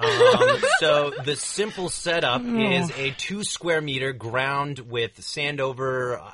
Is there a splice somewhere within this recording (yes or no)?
no